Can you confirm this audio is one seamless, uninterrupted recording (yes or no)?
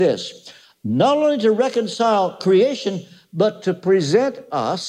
yes